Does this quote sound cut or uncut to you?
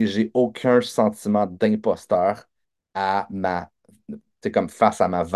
uncut